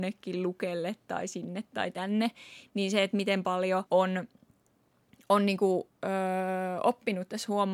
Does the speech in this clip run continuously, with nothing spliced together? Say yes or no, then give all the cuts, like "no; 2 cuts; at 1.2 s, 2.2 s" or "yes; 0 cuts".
no; 1 cut; at 3.9 s